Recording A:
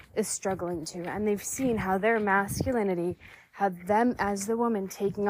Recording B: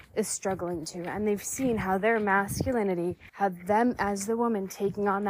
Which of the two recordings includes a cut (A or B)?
B